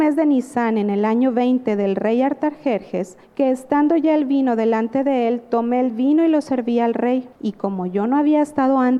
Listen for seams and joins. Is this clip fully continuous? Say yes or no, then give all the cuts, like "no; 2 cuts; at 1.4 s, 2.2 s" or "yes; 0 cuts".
no; 2 cuts; at 3.2 s, 7.3 s